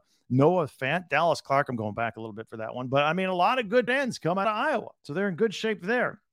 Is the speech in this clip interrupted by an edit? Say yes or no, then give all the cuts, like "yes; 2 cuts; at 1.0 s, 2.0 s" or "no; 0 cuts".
yes; 3 cuts; at 3.9 s, 4.4 s, 5.0 s